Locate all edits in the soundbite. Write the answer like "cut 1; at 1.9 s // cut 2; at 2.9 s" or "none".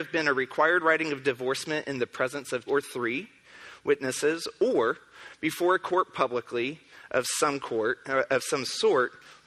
cut 1; at 2.7 s